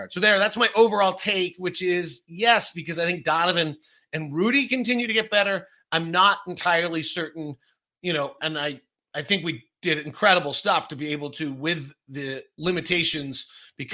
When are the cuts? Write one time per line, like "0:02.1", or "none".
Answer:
0:08.4